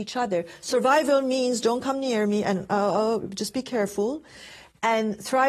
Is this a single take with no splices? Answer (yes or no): yes